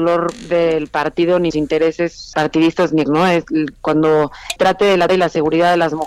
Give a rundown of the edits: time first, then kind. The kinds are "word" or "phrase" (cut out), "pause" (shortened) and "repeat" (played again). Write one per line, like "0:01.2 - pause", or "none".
0:01.5 - word
0:02.3 - word
0:03.1 - word
0:04.6 - word
0:05.1 - word